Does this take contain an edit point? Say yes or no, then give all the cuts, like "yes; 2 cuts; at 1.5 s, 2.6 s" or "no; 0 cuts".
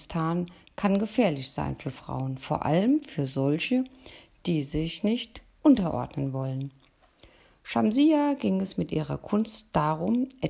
no; 0 cuts